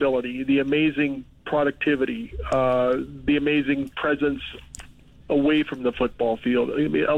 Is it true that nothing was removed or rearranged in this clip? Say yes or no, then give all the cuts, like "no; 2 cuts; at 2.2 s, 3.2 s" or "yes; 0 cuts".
yes; 0 cuts